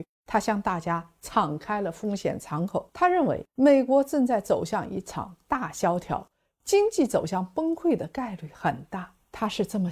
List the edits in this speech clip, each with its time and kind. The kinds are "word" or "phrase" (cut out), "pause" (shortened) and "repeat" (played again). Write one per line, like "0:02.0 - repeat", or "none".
none